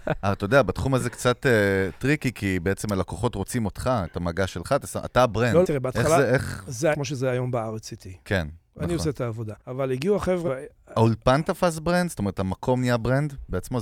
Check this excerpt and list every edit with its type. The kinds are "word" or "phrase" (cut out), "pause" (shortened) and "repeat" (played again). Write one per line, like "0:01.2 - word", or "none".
0:05.6 - phrase
0:06.9 - phrase
0:09.6 - pause
0:10.5 - word